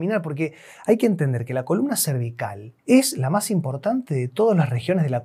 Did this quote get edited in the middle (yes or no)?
yes